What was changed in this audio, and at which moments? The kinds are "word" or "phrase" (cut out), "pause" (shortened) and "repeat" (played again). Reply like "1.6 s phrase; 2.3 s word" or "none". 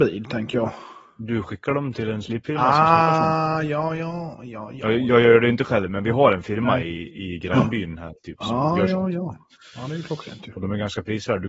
none